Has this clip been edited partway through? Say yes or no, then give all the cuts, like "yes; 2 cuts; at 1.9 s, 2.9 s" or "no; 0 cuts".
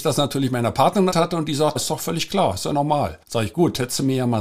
yes; 3 cuts; at 1.1 s, 1.8 s, 3.2 s